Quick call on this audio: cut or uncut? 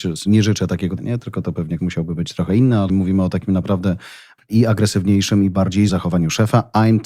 cut